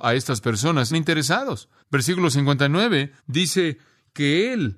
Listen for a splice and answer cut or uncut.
cut